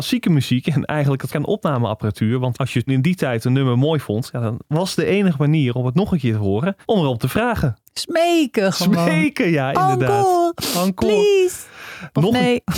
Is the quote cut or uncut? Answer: cut